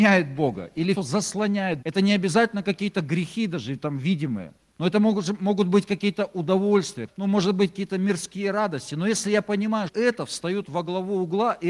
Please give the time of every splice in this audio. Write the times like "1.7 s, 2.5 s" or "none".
0.9 s, 1.8 s, 4.7 s, 7.1 s, 9.9 s

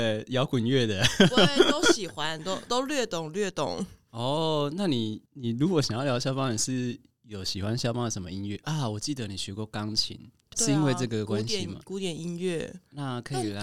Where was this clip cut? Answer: 5.3 s, 10.5 s

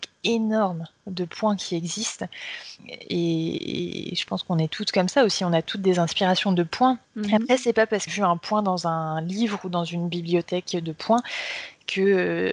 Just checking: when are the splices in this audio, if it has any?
2.8 s, 7.0 s, 8.1 s

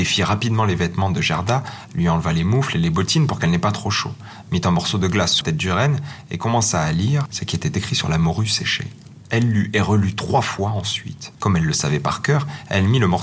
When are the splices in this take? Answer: 5.4 s

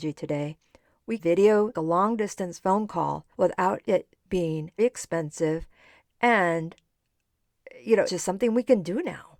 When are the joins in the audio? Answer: 1.2 s, 1.7 s, 3.3 s, 4.8 s, 8.1 s

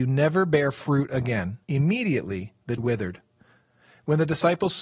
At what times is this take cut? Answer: 1.6 s, 2.8 s

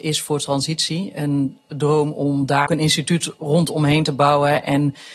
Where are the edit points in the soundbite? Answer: 2.7 s

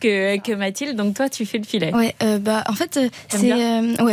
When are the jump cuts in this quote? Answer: none

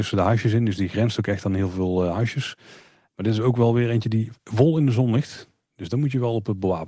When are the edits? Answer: none

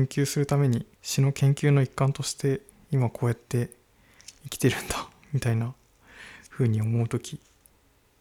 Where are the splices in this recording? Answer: 0.9 s, 2.7 s

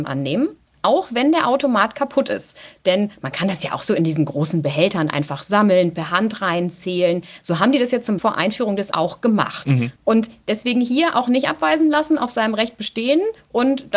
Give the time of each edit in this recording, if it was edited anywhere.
8.2 s, 8.9 s, 10.0 s

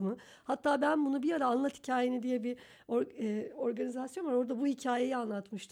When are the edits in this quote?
none

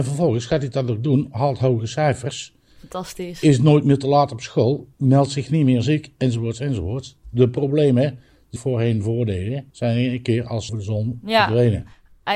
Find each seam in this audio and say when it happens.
4.9 s, 8.6 s, 9.7 s, 10.7 s

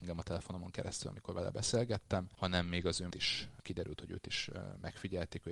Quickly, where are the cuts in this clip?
3.1 s

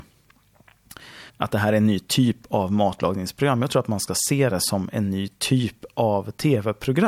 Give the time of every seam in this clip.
1.3 s

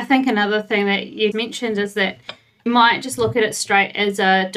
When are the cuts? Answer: 1.3 s, 2.7 s

